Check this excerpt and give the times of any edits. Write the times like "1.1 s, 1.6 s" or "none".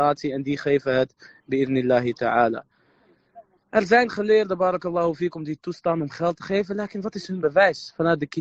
none